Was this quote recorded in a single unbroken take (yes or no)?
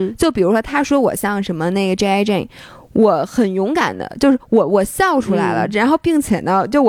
yes